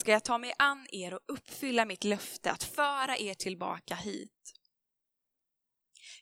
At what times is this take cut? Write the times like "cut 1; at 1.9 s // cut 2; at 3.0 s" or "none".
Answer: none